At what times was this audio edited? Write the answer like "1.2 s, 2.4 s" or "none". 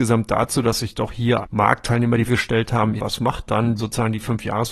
1.4 s, 2.3 s, 3.0 s, 3.5 s, 3.8 s